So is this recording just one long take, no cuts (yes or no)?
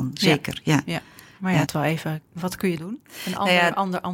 no